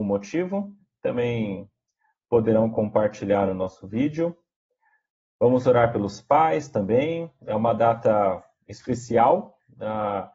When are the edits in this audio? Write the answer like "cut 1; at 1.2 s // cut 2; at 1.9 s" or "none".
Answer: none